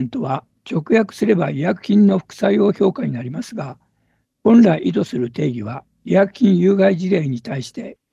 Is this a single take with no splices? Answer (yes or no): yes